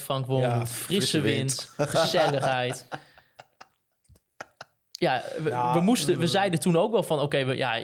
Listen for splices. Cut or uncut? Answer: uncut